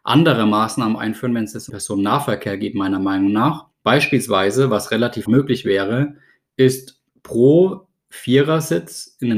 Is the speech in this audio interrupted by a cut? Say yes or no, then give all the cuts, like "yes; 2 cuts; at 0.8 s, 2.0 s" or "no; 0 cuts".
yes; 4 cuts; at 1.7 s, 3.7 s, 5.3 s, 7.1 s